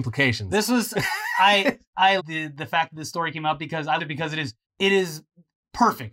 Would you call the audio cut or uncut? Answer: cut